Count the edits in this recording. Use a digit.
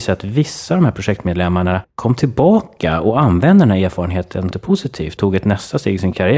3